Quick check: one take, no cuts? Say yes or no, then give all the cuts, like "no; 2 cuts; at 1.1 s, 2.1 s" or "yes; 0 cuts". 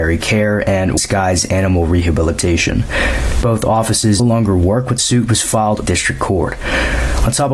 no; 4 cuts; at 1.0 s, 4.2 s, 5.0 s, 5.8 s